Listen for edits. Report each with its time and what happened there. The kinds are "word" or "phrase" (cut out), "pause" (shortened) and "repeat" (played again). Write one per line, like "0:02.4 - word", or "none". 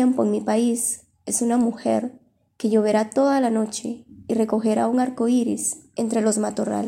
none